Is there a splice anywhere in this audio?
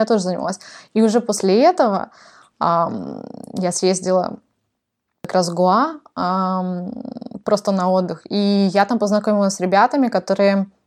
no; 0 cuts

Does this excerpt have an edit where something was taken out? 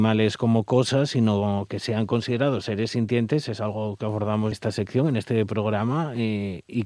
yes; 1 cut; at 4.5 s

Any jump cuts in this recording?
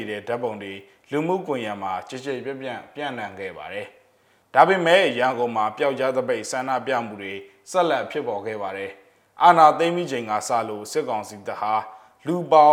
no; 0 cuts

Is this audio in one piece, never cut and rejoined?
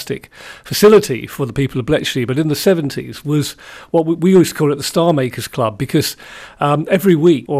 yes; 0 cuts

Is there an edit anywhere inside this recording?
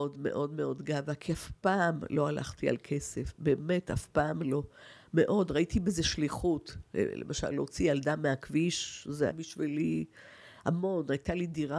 yes; 1 cut; at 9.3 s

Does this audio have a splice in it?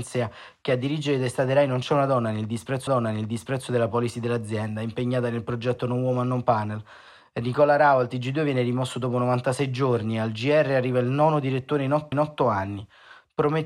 yes; 2 cuts; at 2.9 s, 12.1 s

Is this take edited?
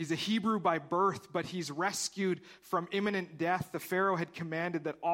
no; 0 cuts

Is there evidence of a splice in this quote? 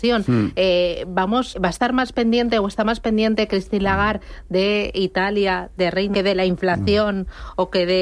yes; 2 cuts; at 1.5 s, 6.1 s

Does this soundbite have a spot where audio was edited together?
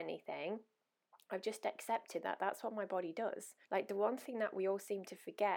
yes; 1 cut; at 3.6 s

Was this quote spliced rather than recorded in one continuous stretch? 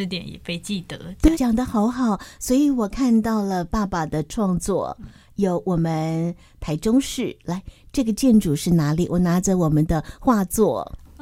yes; 1 cut; at 1.3 s

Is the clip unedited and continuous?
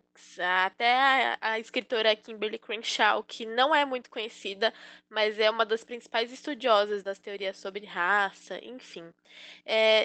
yes; 0 cuts

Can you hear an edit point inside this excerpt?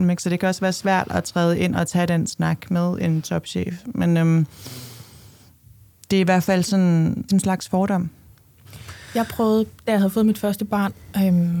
yes; 1 cut; at 7.3 s

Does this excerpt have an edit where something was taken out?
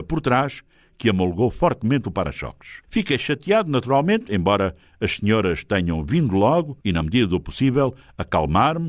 yes; 2 cuts; at 2.8 s, 6.8 s

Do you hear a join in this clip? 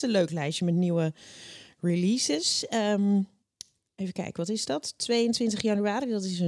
no; 0 cuts

